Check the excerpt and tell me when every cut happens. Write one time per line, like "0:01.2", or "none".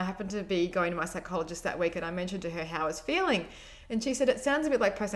none